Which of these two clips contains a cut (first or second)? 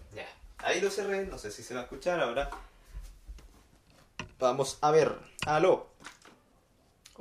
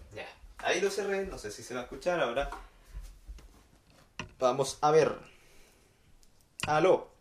first